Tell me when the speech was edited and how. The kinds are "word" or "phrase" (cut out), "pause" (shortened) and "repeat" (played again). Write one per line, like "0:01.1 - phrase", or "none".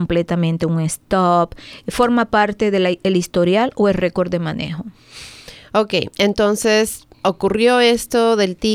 0:07.1 - pause